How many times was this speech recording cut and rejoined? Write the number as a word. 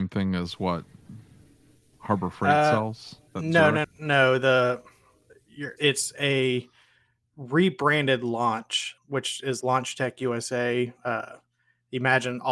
five